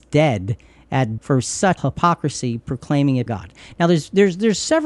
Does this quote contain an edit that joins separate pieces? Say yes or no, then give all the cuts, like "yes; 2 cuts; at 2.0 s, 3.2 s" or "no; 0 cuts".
yes; 3 cuts; at 1.2 s, 1.8 s, 3.3 s